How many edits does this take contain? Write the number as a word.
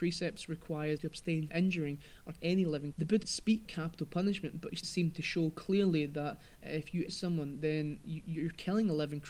nine